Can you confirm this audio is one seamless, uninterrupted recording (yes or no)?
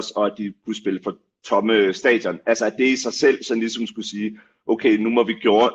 yes